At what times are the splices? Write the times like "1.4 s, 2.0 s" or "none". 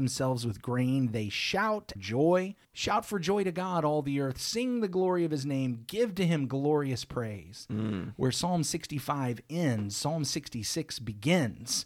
2.0 s, 2.6 s